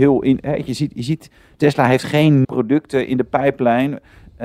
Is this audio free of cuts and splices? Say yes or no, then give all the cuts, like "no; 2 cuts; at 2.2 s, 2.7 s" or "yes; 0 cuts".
no; 2 cuts; at 1.5 s, 2.4 s